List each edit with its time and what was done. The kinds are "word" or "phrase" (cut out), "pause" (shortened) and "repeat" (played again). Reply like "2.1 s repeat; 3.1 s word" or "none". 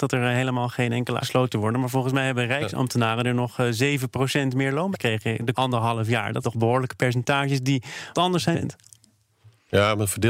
1.2 s word; 4.9 s word; 5.5 s word; 6.4 s word; 8.1 s word; 8.5 s word

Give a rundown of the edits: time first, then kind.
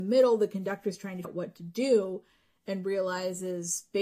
1.2 s word

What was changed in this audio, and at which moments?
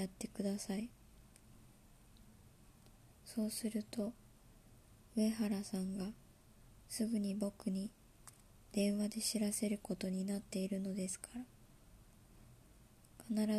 3.1 s pause

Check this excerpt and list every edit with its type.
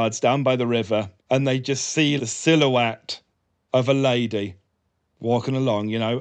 1.2 s pause; 2.2 s word

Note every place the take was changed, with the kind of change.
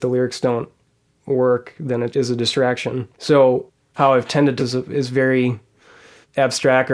2.1 s word; 3.1 s pause; 4.6 s phrase

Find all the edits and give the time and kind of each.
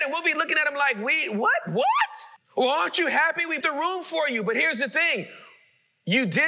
2.4 s pause; 3.6 s word

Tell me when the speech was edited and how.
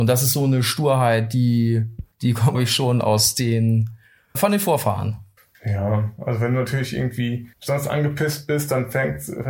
2.1 s pause; 2.5 s word; 4.3 s word; 5.4 s pause; 7.5 s pause

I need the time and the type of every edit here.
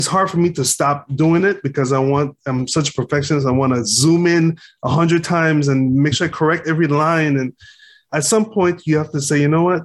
none

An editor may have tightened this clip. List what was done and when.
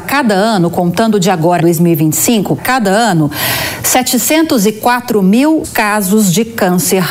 1.6 s word; 2.6 s word; 5.6 s word

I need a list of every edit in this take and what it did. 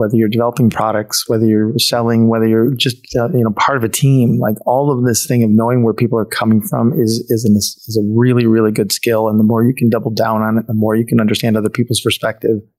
none

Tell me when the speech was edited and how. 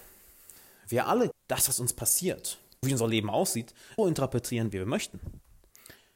1.3 s word; 2.8 s word; 4.0 s word

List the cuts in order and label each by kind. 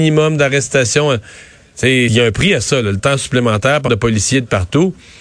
2.1 s word; 3.0 s word; 3.9 s word

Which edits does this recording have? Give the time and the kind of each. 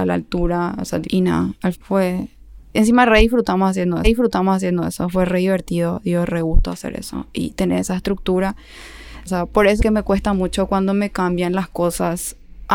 1.0 s word; 1.7 s word; 4.0 s repeat; 9.3 s phrase; 9.8 s phrase

